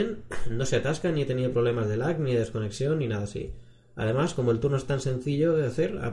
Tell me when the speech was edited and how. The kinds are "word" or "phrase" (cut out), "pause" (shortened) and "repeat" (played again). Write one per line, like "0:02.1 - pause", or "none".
none